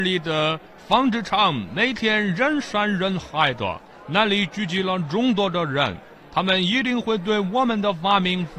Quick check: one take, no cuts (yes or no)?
yes